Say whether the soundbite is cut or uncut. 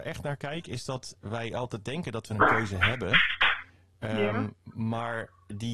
uncut